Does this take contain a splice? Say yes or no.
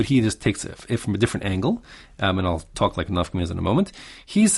no